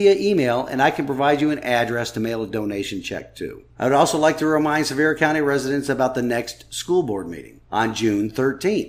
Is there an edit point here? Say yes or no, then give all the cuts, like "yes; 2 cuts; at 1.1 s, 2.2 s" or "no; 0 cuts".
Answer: yes; 2 cuts; at 3.7 s, 7.7 s